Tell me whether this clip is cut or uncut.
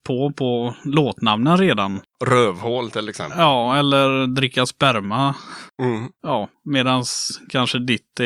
uncut